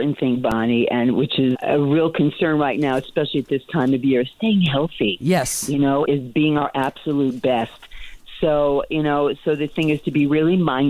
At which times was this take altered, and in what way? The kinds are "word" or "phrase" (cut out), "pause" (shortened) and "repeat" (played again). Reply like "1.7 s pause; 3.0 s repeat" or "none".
1.5 s word; 6.0 s word